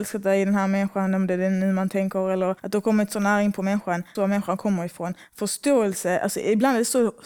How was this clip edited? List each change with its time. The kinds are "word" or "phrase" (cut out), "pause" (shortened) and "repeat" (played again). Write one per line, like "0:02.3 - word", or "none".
0:02.6 - pause
0:04.2 - phrase

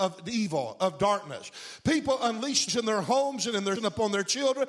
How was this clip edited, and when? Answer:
0:02.7 - word
0:03.8 - word

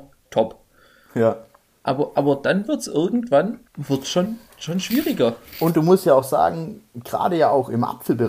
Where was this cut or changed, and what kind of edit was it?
0:03.7 - pause

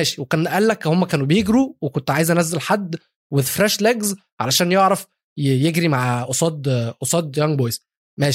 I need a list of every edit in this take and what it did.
none

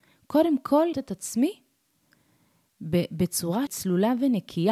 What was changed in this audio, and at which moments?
0:00.9 - word
0:03.7 - word

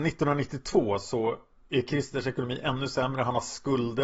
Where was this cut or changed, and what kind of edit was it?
none

